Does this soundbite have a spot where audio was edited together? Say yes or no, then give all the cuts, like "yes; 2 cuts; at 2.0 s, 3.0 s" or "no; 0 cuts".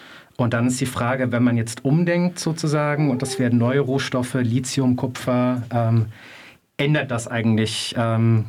no; 0 cuts